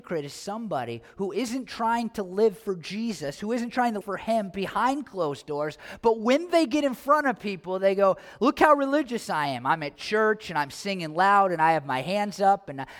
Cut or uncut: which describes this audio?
cut